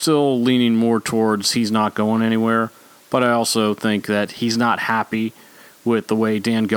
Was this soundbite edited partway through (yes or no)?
no